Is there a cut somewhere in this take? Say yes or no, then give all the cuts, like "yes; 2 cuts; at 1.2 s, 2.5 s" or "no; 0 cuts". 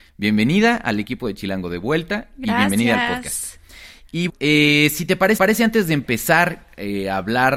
yes; 2 cuts; at 4.3 s, 5.4 s